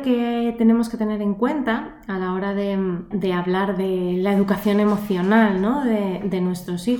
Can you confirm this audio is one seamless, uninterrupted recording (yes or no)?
no